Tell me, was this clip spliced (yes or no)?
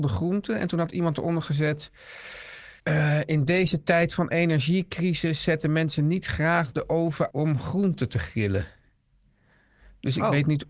yes